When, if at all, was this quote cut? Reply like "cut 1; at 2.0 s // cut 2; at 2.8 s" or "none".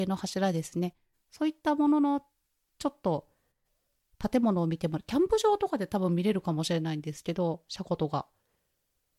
none

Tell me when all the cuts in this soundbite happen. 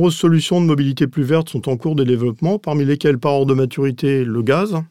none

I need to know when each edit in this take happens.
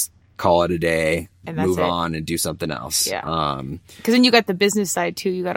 cut 1; at 1.4 s

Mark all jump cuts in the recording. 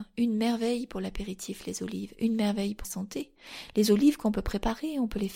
cut 1; at 2.8 s

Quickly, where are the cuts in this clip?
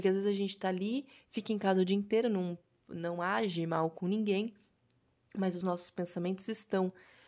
none

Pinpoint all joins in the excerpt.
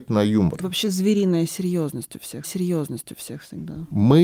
cut 1; at 2.4 s

